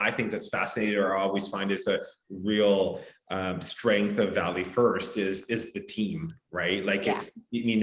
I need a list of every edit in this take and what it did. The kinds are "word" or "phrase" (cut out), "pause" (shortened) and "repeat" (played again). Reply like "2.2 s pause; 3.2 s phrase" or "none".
none